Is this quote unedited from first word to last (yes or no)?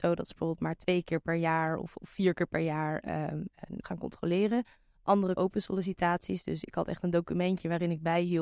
no